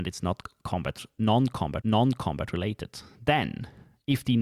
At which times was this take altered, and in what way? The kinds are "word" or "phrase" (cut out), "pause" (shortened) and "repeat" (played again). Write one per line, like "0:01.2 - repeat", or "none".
0:01.8 - repeat